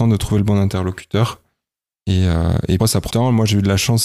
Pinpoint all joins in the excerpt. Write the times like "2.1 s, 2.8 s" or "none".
2.8 s, 3.1 s